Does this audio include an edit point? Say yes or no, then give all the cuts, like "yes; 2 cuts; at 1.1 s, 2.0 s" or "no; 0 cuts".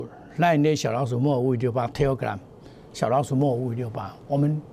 no; 0 cuts